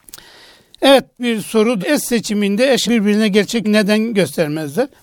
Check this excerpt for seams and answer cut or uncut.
cut